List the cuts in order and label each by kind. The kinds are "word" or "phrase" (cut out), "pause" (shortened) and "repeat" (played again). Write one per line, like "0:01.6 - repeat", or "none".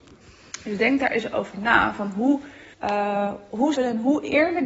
0:02.7 - pause
0:03.7 - phrase